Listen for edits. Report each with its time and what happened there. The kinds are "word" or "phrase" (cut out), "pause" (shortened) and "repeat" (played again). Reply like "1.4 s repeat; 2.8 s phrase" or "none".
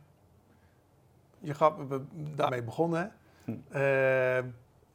1.3 s word; 2.5 s phrase